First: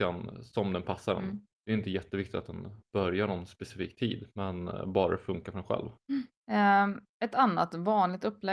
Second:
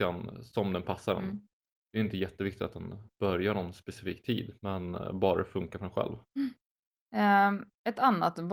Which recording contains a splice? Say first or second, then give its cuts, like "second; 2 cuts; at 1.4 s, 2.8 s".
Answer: first; 2 cuts; at 1.6 s, 6.4 s